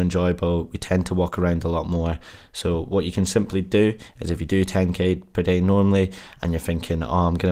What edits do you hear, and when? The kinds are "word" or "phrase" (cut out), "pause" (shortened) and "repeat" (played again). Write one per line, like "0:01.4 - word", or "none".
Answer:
none